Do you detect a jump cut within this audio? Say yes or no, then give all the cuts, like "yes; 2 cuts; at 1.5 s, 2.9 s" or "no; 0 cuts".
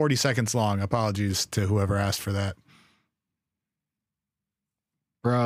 no; 0 cuts